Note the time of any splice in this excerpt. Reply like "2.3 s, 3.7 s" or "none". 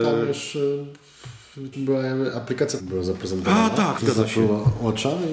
1.7 s, 2.8 s, 4.0 s